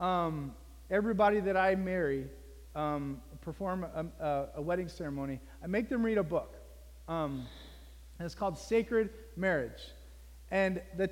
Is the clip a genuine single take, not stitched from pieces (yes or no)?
yes